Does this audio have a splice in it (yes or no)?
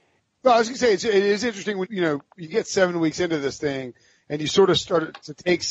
yes